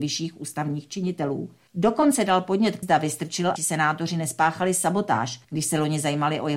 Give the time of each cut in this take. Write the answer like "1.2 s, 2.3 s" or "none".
1.7 s, 2.8 s, 3.6 s, 5.4 s